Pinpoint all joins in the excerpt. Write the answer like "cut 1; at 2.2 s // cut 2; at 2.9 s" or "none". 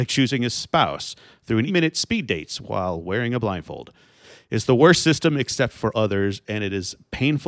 cut 1; at 1.7 s // cut 2; at 5.9 s